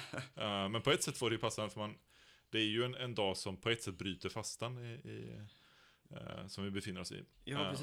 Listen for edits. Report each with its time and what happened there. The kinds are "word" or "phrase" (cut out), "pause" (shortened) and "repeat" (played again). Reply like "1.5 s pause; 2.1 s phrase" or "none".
none